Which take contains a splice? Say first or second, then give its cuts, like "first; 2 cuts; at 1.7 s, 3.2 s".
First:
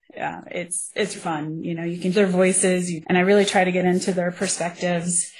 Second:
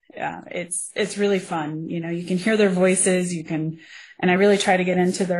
first; 3 cuts; at 1.1 s, 2.1 s, 3.0 s